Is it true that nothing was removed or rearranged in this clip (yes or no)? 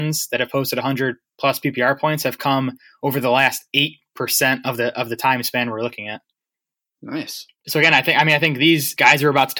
yes